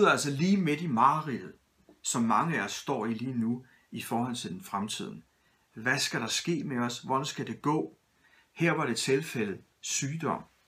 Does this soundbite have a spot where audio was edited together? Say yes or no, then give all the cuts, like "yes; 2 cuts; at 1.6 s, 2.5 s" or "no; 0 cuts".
no; 0 cuts